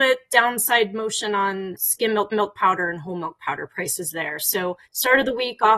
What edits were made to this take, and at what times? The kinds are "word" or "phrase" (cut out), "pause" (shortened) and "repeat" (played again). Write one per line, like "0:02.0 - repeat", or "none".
0:02.3 - repeat
0:04.9 - pause